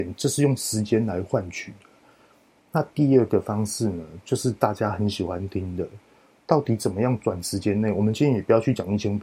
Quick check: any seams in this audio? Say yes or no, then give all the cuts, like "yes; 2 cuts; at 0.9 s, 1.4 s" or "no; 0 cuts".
no; 0 cuts